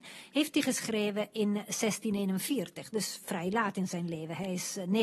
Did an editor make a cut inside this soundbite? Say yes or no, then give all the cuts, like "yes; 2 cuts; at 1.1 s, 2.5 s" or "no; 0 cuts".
no; 0 cuts